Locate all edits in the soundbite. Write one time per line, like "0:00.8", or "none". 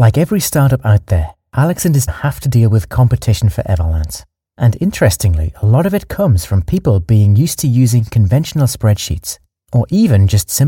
0:02.1